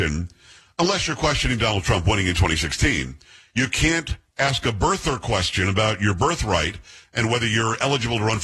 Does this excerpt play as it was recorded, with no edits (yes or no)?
yes